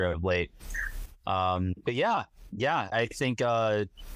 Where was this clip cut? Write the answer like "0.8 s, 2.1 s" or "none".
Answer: 2.9 s